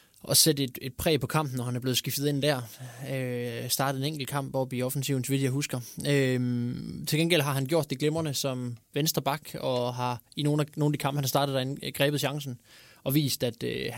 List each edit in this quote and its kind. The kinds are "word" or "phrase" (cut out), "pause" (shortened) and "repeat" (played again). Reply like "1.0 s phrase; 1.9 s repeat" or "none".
none